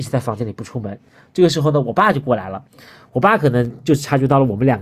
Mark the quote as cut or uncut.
uncut